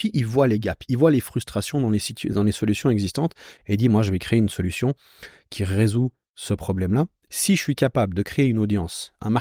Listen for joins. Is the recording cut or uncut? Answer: cut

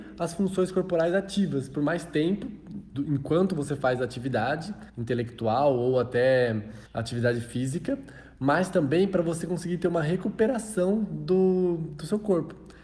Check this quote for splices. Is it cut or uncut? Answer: cut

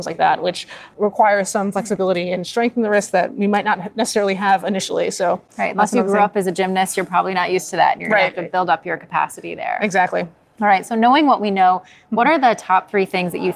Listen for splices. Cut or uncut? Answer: uncut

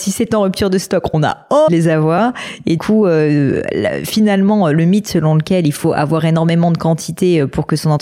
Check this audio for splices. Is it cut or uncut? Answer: cut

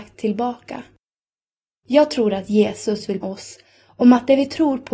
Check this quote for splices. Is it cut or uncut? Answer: cut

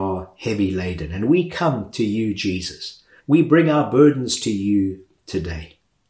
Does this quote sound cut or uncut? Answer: cut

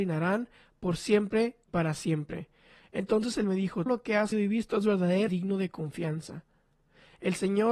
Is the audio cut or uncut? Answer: cut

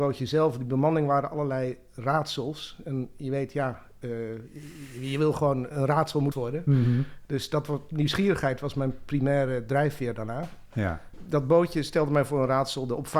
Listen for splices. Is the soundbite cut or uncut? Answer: cut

